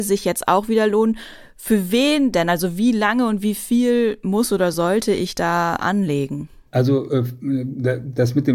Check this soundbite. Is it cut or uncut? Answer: uncut